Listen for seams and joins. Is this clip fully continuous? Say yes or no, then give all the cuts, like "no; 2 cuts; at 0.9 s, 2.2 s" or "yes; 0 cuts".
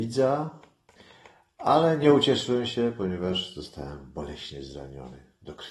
yes; 0 cuts